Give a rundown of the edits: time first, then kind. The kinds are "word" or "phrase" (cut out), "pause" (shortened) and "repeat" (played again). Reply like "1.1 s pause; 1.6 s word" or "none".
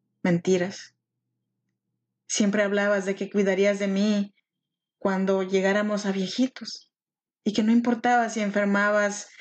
none

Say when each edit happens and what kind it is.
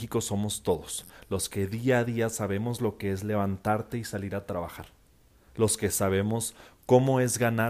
none

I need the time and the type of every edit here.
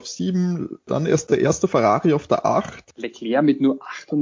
none

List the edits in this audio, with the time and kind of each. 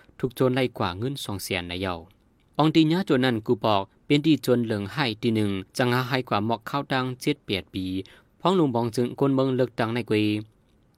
5.7 s pause

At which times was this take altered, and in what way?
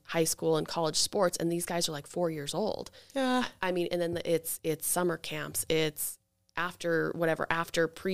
none

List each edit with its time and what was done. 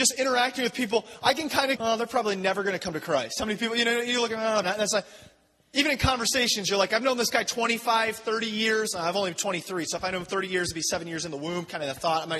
1.8 s word; 4.6 s word

